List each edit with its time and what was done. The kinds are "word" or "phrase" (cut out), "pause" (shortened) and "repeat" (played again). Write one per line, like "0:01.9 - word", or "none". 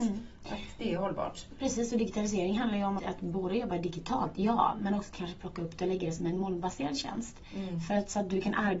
0:03.0 - word